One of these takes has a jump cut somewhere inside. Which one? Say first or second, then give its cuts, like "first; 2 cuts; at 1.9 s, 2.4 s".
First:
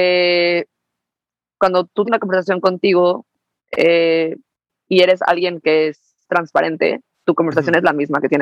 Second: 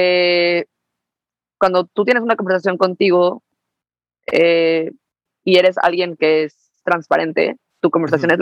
first; 2 cuts; at 2.0 s, 3.6 s